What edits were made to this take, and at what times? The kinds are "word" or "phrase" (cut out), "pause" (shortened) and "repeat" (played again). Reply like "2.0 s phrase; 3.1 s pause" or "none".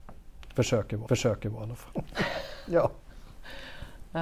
1.1 s repeat